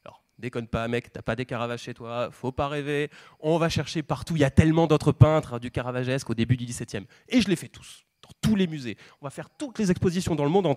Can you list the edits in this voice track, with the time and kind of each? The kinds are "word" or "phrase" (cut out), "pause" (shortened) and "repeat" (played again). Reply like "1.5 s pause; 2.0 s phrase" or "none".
none